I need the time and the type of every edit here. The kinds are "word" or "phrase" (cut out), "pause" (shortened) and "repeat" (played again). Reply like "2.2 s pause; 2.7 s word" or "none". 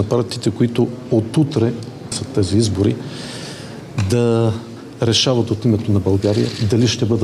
2.1 s word